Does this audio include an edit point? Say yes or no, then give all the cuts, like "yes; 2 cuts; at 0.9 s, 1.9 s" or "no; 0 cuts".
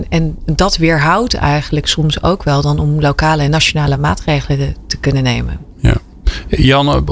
no; 0 cuts